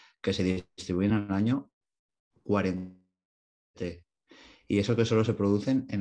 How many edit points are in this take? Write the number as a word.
zero